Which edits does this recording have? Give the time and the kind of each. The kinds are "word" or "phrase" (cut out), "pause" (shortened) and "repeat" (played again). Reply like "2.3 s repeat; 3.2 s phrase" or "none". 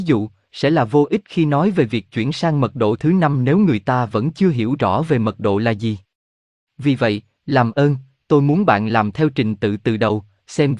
none